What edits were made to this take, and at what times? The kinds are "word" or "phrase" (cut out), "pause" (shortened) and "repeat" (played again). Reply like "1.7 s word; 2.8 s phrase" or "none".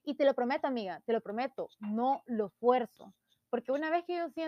none

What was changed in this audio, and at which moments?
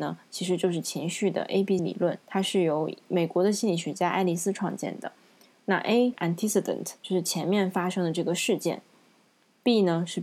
1.8 s word; 2.2 s pause; 6.1 s phrase; 7.0 s pause

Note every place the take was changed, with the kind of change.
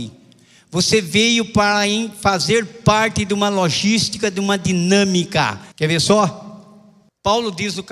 5.7 s pause

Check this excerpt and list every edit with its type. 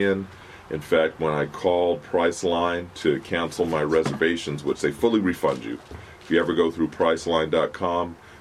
none

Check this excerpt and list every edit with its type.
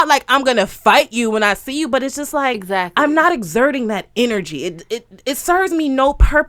none

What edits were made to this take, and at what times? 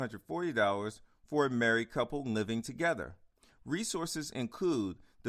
none

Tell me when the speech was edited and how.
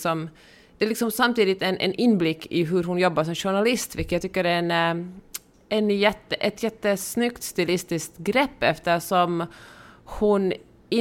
none

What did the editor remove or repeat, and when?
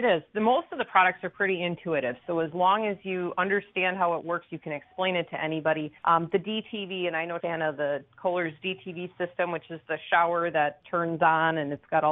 6.0 s pause; 7.4 s phrase

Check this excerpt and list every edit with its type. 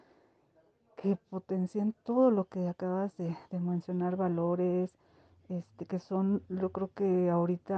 none

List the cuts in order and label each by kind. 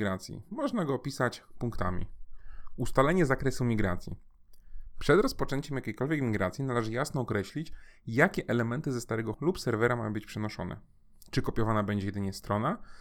9.3 s word

